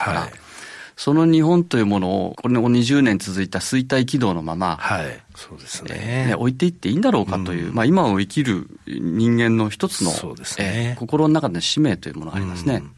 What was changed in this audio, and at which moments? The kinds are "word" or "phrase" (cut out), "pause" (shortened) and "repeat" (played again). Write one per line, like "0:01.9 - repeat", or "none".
0:05.3 - phrase